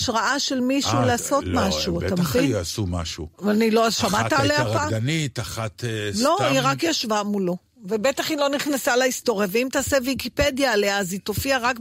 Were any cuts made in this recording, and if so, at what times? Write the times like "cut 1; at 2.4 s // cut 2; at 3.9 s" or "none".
none

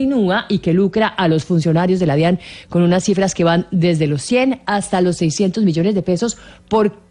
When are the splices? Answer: none

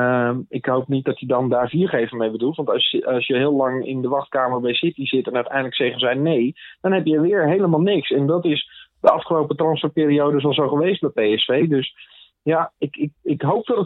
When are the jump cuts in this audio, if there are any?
none

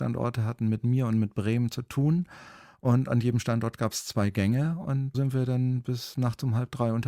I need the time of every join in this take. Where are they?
cut 1; at 5.1 s

